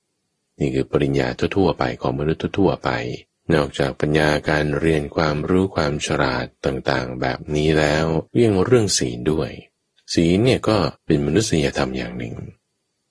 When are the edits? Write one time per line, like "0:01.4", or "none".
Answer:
0:03.3
0:08.3
0:09.7
0:11.0